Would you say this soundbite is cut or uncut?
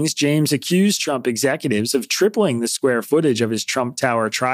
uncut